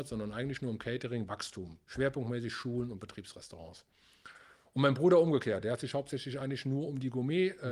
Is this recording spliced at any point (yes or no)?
no